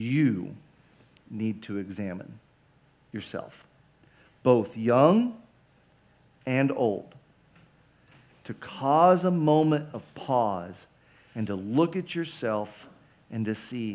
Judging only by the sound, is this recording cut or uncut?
uncut